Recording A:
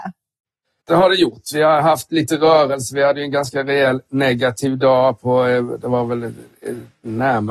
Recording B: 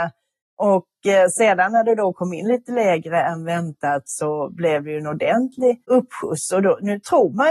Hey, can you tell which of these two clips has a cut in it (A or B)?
B